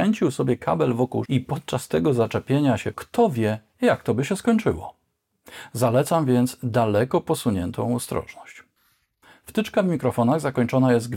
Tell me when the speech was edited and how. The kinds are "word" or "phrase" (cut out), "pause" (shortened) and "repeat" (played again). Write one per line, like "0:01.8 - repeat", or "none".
0:01.2 - word
0:02.9 - phrase